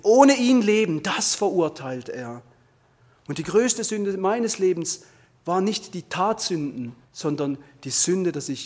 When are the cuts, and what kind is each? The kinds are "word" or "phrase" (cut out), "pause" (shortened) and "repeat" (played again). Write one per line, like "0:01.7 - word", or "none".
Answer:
0:07.0 - pause

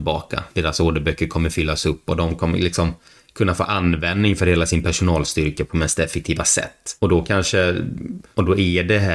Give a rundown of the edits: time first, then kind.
none

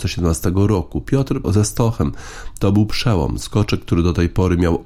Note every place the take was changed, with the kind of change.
0:01.4 - phrase

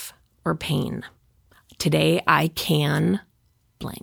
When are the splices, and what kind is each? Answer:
none

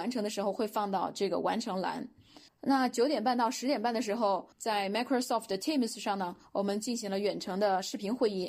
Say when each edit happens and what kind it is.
0:02.5 - pause
0:04.5 - pause

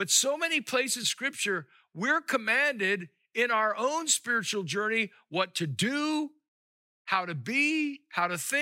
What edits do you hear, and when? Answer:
0:01.0 - word

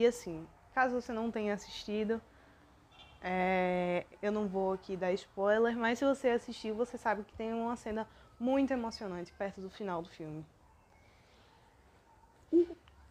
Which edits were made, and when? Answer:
none

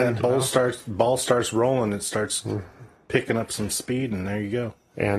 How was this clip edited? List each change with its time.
none

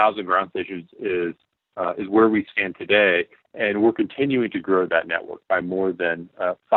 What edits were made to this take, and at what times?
none

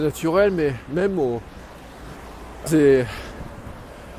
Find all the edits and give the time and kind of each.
0:02.7 - phrase

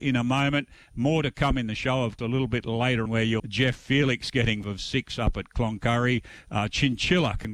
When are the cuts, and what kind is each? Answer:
0:02.2 - word
0:03.1 - word
0:03.4 - word
0:04.6 - word

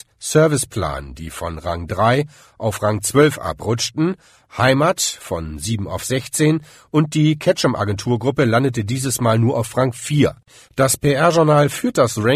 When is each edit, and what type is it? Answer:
none

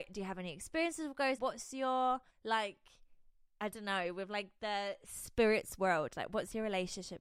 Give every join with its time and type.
0:01.4 - word
0:02.3 - pause

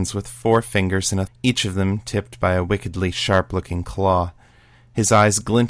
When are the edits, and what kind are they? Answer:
0:01.3 - word

